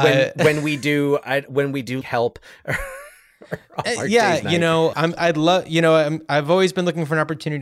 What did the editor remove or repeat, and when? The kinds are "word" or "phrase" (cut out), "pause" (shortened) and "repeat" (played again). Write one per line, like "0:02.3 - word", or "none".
0:02.0 - word
0:04.9 - word